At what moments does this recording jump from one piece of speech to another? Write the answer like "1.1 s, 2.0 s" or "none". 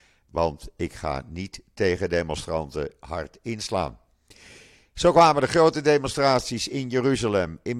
none